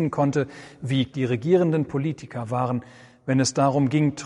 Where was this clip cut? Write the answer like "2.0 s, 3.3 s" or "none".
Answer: 1.1 s